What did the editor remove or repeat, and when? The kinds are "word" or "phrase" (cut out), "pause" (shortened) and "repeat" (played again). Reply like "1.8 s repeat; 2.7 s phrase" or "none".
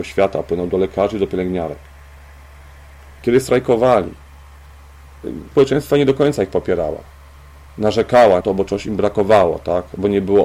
5.5 s word; 8.4 s word